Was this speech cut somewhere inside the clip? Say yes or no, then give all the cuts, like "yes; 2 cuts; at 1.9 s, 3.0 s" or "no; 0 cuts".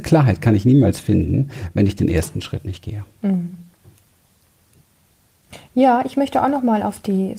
no; 0 cuts